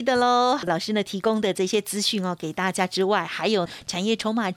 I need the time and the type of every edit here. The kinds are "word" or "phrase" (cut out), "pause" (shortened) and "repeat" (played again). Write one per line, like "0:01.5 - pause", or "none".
none